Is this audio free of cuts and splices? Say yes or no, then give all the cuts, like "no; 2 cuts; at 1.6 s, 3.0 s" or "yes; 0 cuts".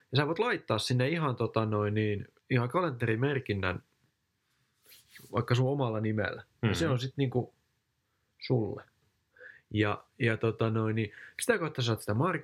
no; 1 cut; at 2.4 s